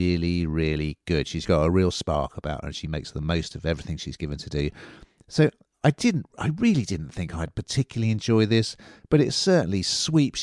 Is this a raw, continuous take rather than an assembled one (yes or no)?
no